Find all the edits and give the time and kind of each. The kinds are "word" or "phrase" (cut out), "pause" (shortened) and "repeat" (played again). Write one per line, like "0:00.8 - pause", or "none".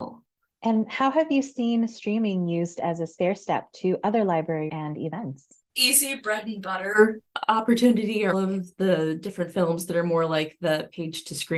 0:04.7 - phrase
0:05.7 - pause
0:08.3 - word